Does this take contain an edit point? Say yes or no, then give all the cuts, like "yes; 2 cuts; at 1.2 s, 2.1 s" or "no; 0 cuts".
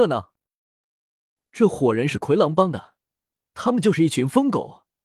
no; 0 cuts